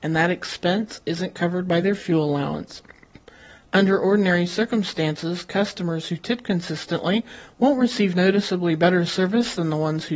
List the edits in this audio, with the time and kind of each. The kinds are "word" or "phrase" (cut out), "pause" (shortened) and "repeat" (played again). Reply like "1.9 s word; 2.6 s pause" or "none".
none